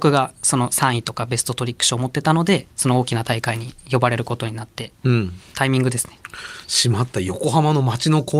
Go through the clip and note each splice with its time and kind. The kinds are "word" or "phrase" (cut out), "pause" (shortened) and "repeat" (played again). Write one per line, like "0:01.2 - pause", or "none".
0:02.7 - pause